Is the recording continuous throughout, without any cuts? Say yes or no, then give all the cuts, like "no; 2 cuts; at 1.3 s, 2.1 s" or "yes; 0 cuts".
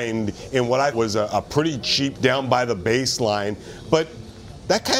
no; 2 cuts; at 0.9 s, 2.1 s